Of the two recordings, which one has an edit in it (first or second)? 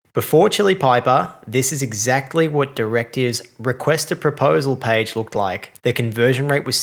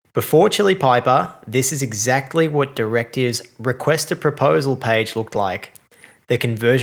first